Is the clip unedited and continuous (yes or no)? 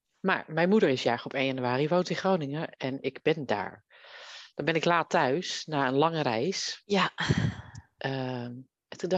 yes